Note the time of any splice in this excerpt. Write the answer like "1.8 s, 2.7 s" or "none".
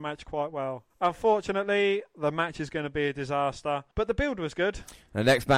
0.9 s, 3.9 s

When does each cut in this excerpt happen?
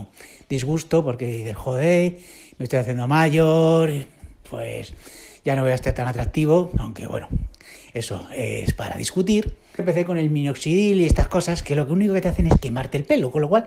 9.8 s

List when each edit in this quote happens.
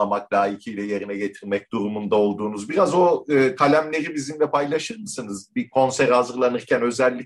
none

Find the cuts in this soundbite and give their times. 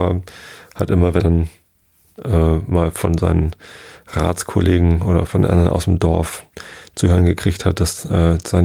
1.2 s, 2.9 s, 5.3 s

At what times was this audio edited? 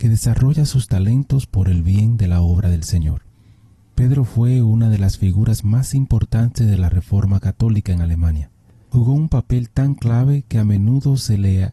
none

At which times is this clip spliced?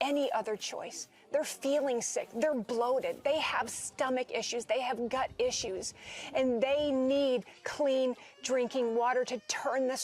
none

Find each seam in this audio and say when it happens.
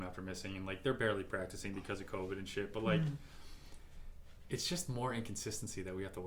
none

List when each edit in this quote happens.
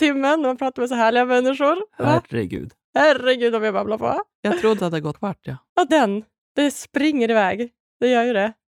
4.8 s, 5.1 s, 5.9 s

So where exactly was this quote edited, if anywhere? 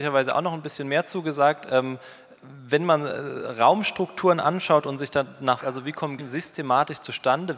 5.6 s, 6.2 s

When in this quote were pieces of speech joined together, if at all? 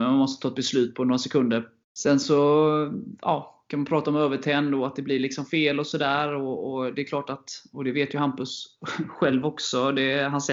none

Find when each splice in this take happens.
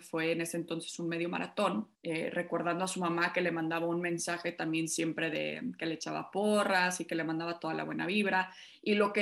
2.0 s

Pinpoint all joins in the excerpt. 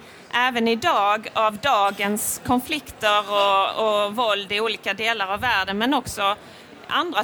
none

